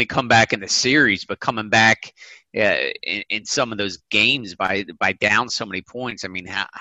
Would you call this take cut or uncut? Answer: uncut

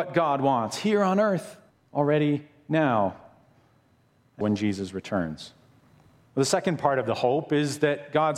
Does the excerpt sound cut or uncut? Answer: cut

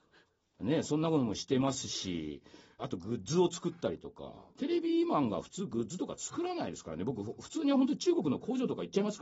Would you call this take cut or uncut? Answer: cut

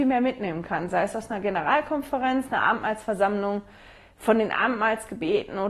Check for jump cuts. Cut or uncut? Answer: uncut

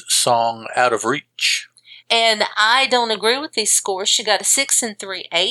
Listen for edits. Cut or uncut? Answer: cut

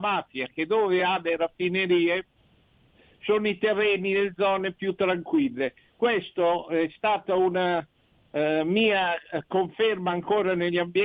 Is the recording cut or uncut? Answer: uncut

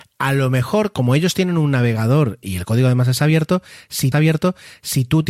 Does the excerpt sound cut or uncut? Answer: cut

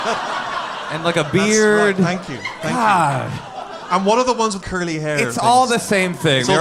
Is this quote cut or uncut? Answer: cut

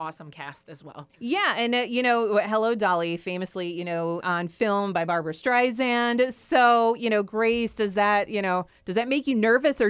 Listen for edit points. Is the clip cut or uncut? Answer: cut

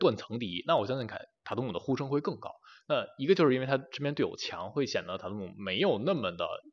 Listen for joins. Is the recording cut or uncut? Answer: uncut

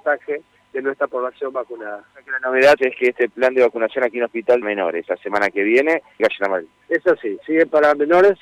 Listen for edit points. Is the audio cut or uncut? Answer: cut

